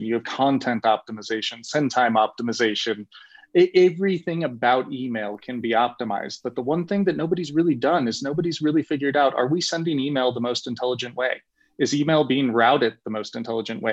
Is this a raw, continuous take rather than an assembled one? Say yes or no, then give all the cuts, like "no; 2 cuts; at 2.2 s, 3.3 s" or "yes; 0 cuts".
yes; 0 cuts